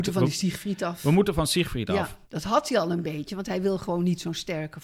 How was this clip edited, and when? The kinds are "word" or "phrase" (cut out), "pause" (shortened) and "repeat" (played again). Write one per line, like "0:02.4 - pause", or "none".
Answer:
0:02.2 - pause